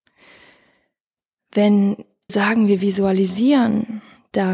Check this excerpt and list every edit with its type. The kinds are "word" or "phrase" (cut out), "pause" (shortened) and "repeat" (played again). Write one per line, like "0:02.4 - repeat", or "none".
0:02.3 - word